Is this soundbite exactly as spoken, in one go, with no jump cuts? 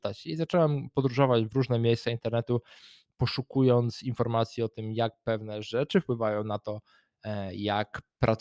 yes; 0 cuts

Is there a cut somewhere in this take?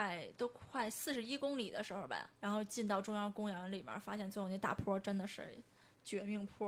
yes; 1 cut; at 2.4 s

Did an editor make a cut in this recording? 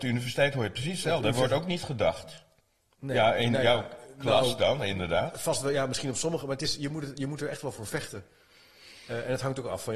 no; 0 cuts

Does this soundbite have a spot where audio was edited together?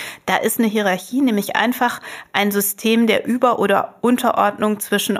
no; 0 cuts

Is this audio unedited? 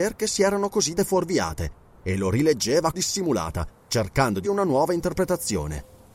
no; 3 cuts; at 1.0 s, 2.9 s, 4.4 s

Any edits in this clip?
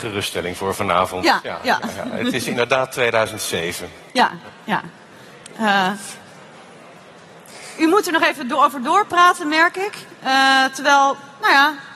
no; 0 cuts

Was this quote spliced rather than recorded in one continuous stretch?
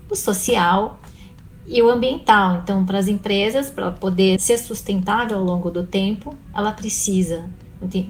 yes; 1 cut; at 4.4 s

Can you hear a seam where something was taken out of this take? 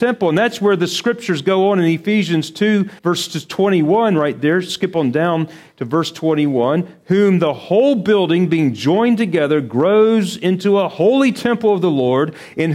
yes; 1 cut; at 3.0 s

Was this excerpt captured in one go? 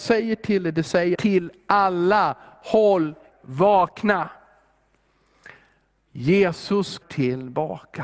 no; 3 cuts; at 1.1 s, 3.3 s, 7.0 s

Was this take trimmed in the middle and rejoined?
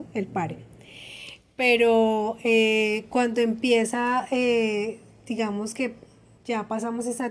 no; 0 cuts

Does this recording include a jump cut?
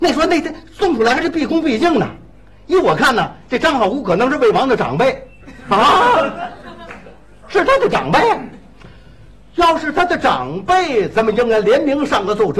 no; 0 cuts

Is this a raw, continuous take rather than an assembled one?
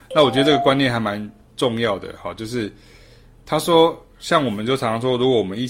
yes; 0 cuts

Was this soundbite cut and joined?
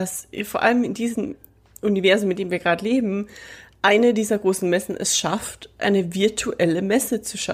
no; 0 cuts

